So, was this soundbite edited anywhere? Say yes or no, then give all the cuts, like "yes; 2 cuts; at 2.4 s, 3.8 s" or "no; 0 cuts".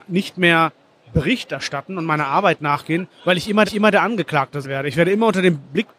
yes; 2 cuts; at 3.6 s, 4.6 s